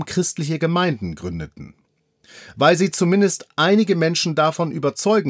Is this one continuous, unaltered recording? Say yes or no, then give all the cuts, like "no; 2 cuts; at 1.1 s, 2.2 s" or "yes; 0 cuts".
yes; 0 cuts